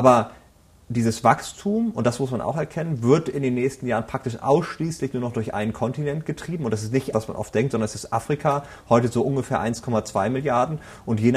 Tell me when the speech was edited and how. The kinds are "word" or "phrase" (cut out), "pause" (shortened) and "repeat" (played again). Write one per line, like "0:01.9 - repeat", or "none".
0:07.1 - word